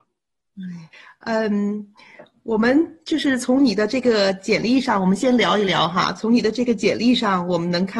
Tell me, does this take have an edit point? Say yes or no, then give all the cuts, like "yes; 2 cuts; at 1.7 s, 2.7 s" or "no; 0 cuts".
yes; 1 cut; at 0.9 s